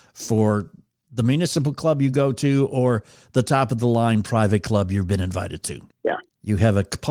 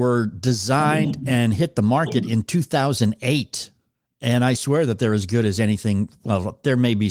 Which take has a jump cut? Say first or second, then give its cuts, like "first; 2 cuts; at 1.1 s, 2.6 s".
second; 1 cut; at 4.5 s